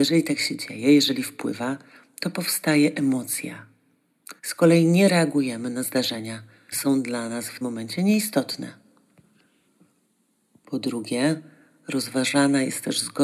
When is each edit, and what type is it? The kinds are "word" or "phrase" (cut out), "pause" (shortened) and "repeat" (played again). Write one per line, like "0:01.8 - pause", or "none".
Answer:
0:04.4 - pause
0:06.7 - word
0:07.6 - word